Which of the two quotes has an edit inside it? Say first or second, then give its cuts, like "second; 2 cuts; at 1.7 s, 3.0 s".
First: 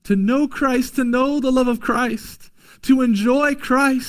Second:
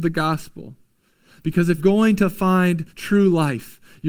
second; 2 cuts; at 1.8 s, 2.9 s